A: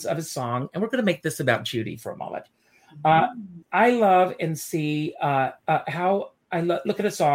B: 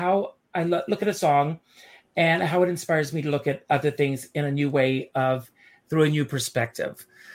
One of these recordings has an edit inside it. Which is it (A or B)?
A